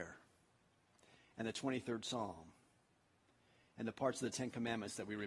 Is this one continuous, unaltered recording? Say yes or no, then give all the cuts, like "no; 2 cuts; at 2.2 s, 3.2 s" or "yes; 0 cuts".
yes; 0 cuts